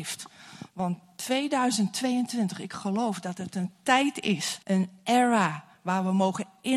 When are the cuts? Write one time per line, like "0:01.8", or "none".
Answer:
0:04.6